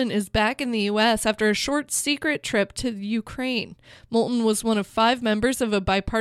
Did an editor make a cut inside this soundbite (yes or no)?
no